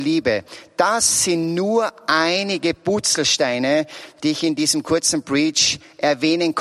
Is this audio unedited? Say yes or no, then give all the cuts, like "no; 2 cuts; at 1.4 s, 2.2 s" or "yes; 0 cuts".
yes; 0 cuts